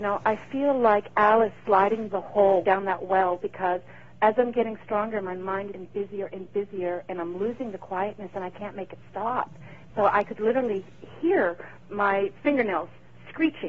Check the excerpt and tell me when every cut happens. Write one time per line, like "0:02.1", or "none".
0:02.1
0:02.6
0:04.1
0:05.7